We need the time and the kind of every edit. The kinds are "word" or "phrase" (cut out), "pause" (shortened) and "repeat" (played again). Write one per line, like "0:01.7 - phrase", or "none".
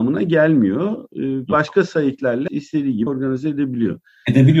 0:02.5 - word
0:03.1 - word

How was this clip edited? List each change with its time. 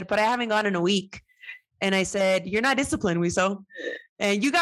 none

